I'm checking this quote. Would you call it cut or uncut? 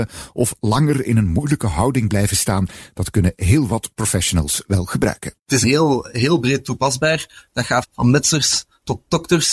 cut